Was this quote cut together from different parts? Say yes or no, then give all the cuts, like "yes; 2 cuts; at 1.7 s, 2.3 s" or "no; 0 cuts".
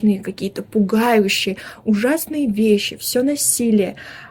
no; 0 cuts